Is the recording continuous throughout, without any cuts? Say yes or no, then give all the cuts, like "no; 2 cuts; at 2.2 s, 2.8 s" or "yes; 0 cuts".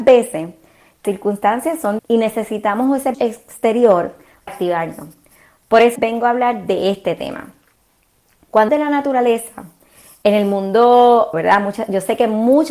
no; 7 cuts; at 1.0 s, 2.0 s, 3.1 s, 4.5 s, 6.0 s, 8.7 s, 11.3 s